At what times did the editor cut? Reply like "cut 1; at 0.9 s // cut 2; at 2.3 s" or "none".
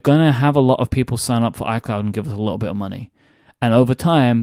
none

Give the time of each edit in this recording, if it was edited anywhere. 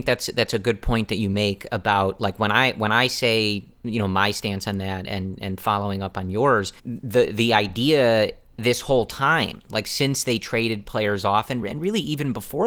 cut 1; at 6.8 s

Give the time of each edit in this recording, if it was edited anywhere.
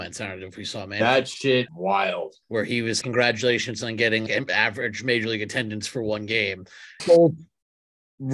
cut 1; at 1.7 s // cut 2; at 2.4 s // cut 3; at 3.0 s // cut 4; at 4.3 s // cut 5; at 7.0 s

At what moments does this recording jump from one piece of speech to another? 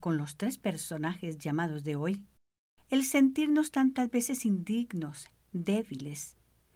none

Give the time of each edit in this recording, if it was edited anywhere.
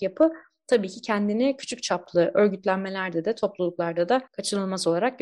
cut 1; at 4.3 s

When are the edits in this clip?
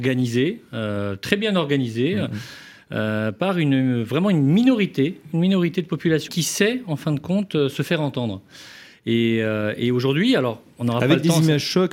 cut 1; at 6.3 s

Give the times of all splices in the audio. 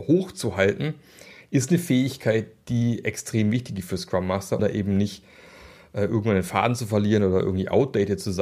cut 1; at 4.6 s

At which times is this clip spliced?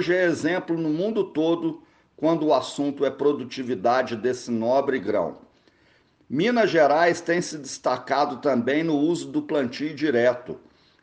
none

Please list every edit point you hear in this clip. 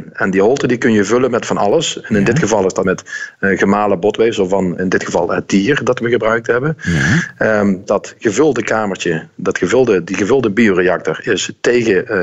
cut 1; at 2.8 s // cut 2; at 4.8 s // cut 3; at 7.9 s

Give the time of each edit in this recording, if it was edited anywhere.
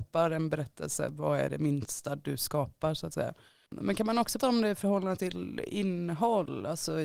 cut 1; at 4.4 s

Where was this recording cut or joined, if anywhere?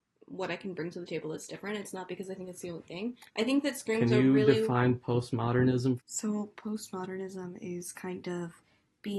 cut 1; at 3.3 s

